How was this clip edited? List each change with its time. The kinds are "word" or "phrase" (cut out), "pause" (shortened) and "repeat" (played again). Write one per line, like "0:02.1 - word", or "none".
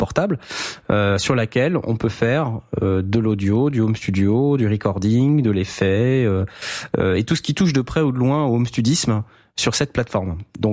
none